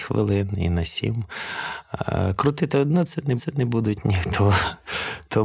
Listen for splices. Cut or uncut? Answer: cut